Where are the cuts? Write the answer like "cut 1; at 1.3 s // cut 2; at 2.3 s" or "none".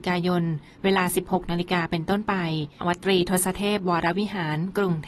cut 1; at 2.8 s